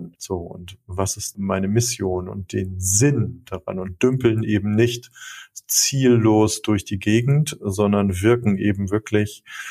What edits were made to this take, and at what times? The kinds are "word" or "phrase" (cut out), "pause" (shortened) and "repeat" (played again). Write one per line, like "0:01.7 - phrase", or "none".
none